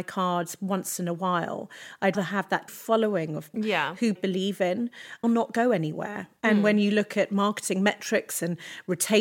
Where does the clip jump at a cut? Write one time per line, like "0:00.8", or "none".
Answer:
0:02.1
0:02.7
0:03.5
0:04.2
0:05.2